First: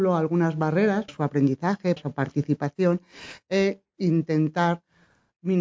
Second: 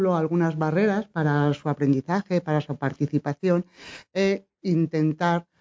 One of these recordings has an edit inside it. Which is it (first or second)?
first